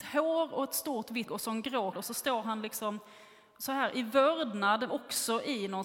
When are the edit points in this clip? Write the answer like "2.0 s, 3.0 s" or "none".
1.3 s, 1.9 s, 4.9 s